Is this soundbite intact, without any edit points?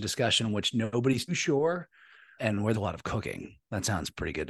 no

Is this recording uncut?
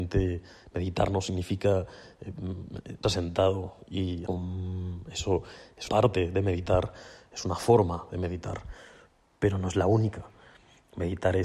no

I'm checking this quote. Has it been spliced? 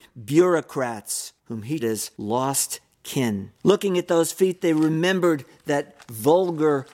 yes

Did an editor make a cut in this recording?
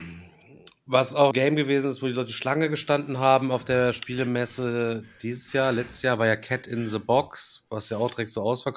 yes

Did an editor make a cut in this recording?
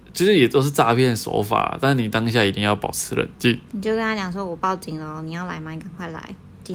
no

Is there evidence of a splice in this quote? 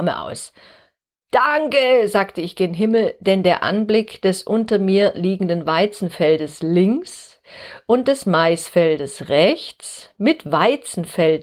no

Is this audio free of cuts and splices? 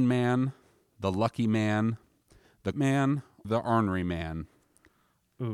no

